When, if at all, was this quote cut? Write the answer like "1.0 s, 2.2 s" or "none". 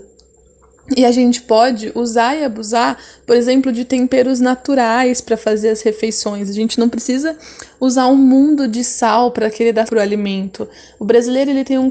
9.9 s